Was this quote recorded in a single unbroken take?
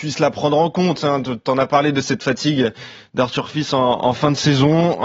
yes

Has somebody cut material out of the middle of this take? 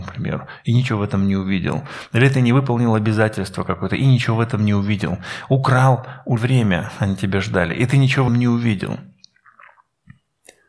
yes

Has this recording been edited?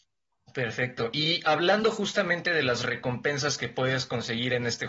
no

